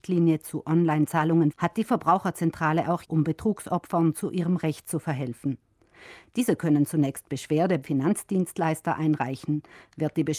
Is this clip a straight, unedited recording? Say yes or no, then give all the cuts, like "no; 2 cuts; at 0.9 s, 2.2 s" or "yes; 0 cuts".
no; 3 cuts; at 1.5 s, 3.0 s, 7.8 s